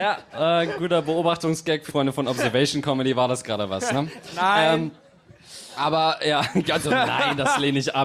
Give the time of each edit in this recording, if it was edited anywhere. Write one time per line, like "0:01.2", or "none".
0:01.9
0:06.8